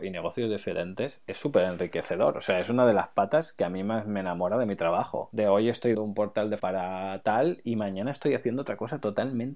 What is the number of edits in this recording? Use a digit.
2